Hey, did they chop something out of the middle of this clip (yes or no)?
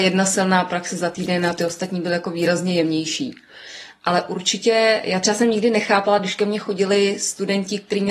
no